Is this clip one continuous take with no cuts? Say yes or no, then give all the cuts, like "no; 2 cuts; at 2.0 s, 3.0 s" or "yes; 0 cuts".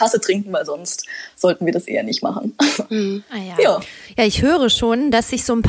yes; 0 cuts